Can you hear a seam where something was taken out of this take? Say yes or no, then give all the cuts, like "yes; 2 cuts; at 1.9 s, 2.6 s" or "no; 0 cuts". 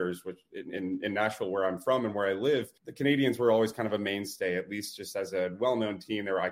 yes; 1 cut; at 2.8 s